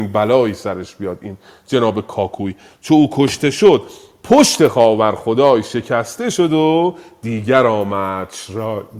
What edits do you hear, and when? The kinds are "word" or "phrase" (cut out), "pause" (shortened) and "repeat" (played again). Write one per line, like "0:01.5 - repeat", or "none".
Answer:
none